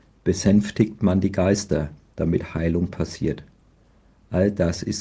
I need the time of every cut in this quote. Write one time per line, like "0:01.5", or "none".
none

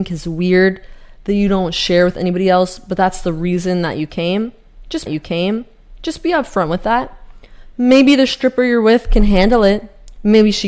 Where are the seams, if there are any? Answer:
0:05.1

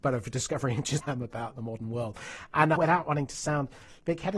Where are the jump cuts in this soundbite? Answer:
0:01.0
0:02.8

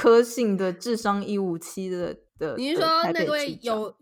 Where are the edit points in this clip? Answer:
0:02.3

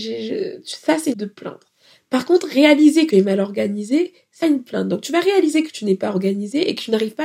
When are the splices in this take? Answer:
0:01.1
0:03.1
0:04.4

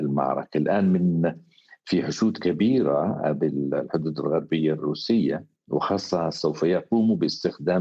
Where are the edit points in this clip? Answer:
none

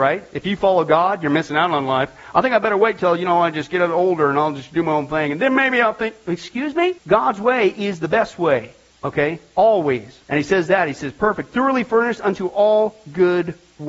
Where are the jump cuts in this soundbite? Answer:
0:07.0
0:08.9
0:10.2

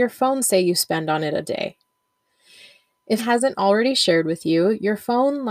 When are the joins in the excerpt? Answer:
0:03.2

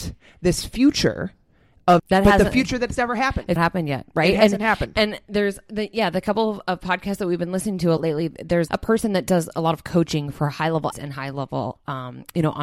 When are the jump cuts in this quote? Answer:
0:02.0
0:03.6
0:08.0
0:08.7
0:10.9

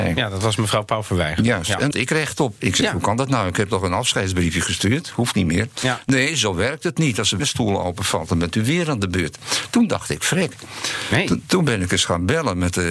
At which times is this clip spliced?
0:01.9
0:07.4

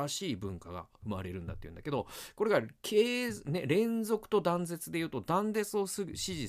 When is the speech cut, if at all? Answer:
none

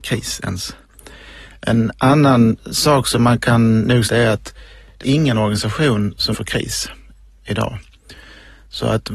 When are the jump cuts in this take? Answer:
0:04.1
0:05.0
0:06.3

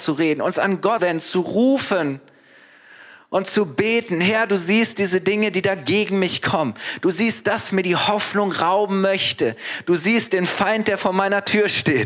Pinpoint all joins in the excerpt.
0:01.0
0:07.7

